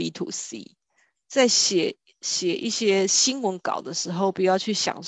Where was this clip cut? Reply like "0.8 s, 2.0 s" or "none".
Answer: none